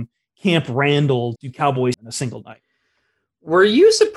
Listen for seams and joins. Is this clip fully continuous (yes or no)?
no